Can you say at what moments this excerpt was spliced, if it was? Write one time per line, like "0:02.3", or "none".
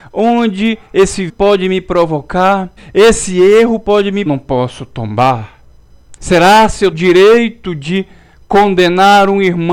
0:01.3
0:02.8
0:04.3
0:06.2
0:06.9

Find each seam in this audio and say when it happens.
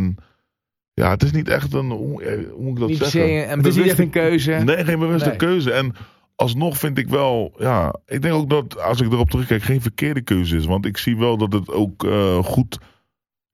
none

